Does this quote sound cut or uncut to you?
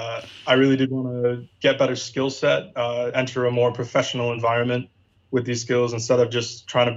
uncut